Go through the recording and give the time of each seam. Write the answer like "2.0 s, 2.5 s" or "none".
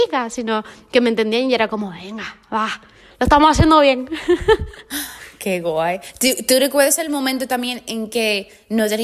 none